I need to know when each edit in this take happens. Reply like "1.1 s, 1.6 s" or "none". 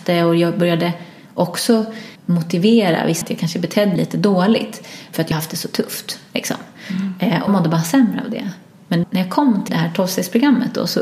2.2 s, 3.2 s, 4.0 s, 5.3 s, 7.5 s, 9.0 s, 9.7 s